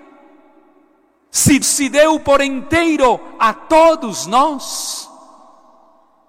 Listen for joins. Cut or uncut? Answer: cut